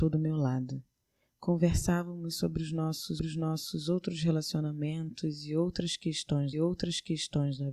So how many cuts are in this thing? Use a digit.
2